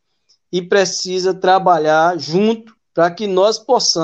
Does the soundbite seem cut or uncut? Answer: cut